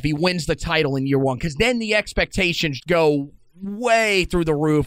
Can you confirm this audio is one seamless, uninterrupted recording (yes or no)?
no